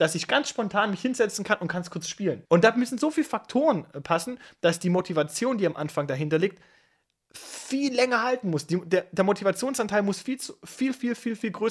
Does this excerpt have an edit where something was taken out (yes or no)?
yes